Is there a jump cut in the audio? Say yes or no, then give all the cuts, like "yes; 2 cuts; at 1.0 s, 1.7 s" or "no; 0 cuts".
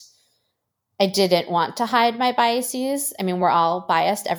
no; 0 cuts